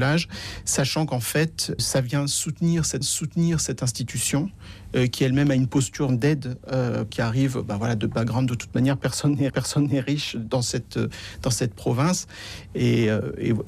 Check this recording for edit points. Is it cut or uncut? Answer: cut